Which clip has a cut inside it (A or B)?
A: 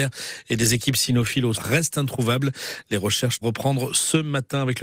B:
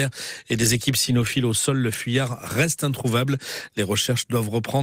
A